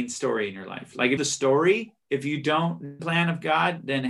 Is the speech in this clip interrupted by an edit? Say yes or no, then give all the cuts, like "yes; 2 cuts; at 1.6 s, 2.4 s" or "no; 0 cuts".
yes; 3 cuts; at 1.2 s, 2.0 s, 3.0 s